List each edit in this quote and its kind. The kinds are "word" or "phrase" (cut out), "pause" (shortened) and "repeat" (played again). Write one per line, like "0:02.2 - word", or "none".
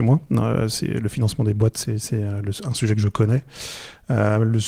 none